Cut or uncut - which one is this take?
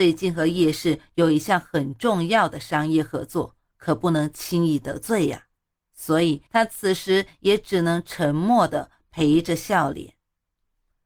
cut